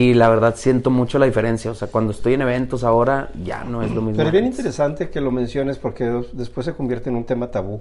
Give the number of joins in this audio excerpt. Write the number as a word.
zero